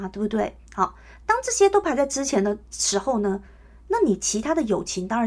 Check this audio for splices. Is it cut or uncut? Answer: uncut